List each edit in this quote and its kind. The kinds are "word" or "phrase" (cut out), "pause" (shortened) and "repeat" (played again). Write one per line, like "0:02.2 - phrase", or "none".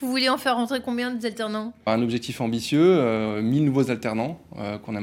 0:01.9 - word